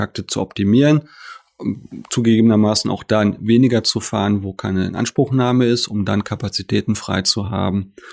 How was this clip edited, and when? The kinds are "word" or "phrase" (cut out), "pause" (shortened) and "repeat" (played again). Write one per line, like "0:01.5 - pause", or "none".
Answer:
none